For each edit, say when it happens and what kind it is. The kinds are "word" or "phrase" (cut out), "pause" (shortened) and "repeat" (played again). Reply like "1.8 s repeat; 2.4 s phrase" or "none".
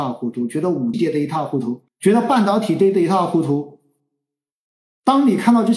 0.9 s word; 1.9 s pause